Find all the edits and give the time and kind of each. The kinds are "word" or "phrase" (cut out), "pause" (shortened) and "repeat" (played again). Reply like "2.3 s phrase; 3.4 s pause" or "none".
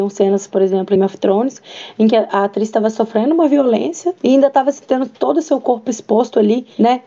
1.0 s word; 4.2 s word